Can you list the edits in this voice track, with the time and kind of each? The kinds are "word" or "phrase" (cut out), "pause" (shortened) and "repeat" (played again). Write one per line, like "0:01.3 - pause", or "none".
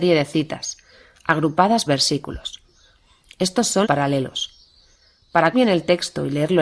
0:01.9 - word
0:03.8 - word
0:05.5 - word